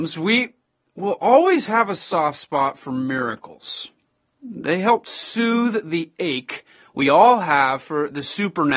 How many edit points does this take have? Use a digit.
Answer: 0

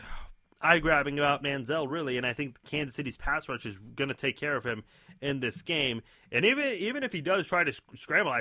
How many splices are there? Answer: 0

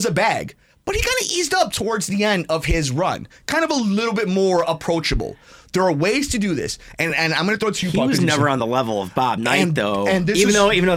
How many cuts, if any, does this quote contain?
0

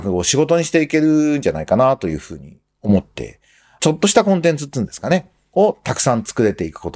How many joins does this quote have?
0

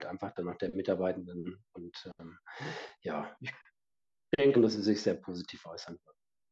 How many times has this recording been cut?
1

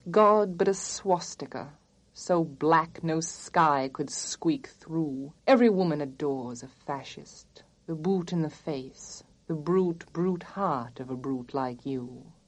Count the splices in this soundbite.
1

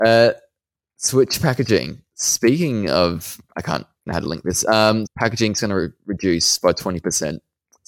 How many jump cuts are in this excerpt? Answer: 2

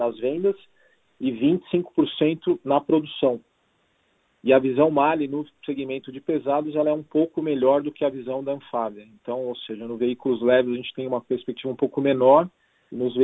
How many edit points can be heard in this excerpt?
0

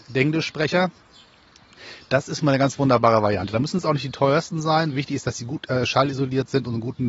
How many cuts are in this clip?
0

